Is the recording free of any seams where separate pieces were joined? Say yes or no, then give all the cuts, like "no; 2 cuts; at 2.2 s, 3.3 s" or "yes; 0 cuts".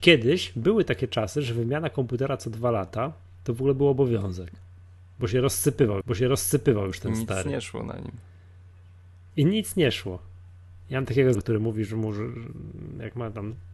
no; 2 cuts; at 6.0 s, 11.3 s